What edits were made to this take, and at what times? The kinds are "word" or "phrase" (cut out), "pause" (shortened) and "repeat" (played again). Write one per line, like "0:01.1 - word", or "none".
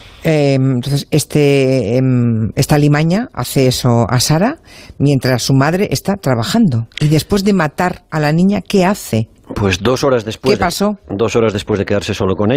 none